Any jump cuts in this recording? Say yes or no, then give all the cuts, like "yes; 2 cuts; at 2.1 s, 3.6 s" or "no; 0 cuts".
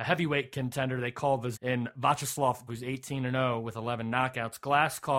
yes; 2 cuts; at 1.5 s, 2.7 s